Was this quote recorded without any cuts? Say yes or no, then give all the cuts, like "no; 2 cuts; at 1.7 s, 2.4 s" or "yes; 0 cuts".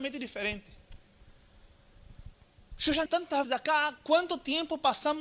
no; 2 cuts; at 3.1 s, 3.4 s